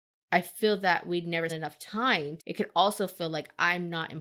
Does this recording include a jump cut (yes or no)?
yes